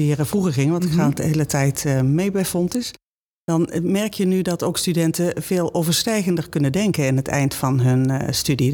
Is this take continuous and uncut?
yes; 0 cuts

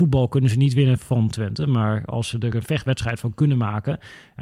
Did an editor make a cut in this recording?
no; 0 cuts

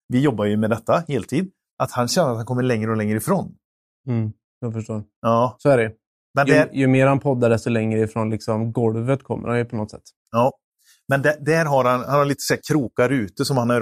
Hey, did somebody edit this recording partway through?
no; 0 cuts

